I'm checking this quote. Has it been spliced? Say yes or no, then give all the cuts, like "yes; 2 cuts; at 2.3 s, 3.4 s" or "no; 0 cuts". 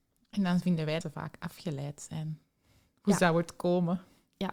yes; 1 cut; at 1.0 s